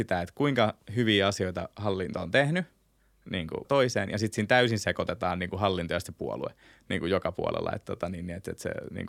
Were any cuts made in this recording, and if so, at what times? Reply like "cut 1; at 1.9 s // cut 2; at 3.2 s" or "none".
cut 1; at 3.6 s